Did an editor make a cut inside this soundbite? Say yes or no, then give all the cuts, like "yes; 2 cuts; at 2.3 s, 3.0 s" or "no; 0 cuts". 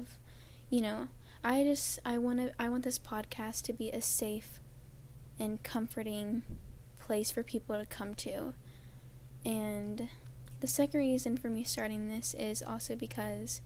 no; 0 cuts